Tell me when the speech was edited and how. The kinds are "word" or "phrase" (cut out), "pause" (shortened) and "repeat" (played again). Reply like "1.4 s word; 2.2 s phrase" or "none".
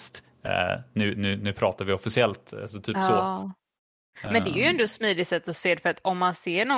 none